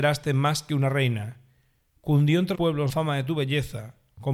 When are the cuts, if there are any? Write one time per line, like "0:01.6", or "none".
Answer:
0:02.5
0:02.9